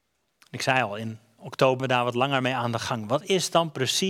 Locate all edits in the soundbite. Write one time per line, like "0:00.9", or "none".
0:01.8